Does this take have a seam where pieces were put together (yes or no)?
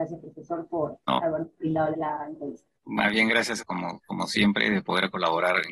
yes